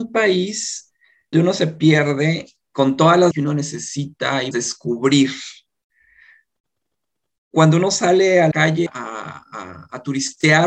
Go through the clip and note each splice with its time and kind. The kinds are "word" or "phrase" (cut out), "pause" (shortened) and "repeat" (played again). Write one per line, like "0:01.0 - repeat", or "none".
0:01.3 - word
0:02.6 - word
0:03.3 - word
0:04.5 - word
0:08.5 - word
0:08.9 - word